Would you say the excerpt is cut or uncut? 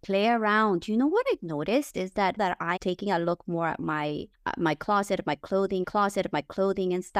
cut